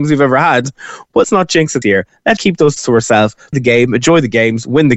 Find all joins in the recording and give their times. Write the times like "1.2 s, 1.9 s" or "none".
1.2 s, 1.8 s, 2.4 s, 2.8 s, 3.5 s

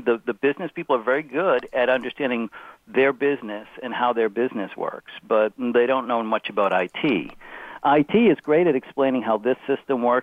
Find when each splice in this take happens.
none

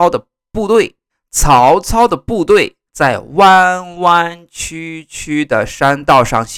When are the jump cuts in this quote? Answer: 1.1 s, 2.9 s

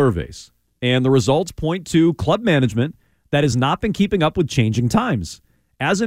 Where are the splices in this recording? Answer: none

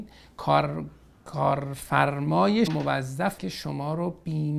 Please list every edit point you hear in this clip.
2.7 s, 3.4 s

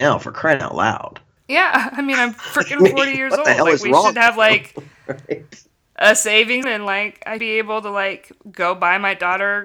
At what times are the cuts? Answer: 1.3 s, 6.6 s, 7.4 s

